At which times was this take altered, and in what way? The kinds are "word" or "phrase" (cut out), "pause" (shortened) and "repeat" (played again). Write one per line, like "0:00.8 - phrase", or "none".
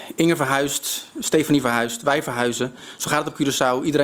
none